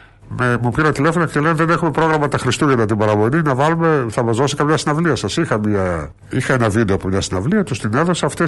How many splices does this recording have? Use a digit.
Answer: 1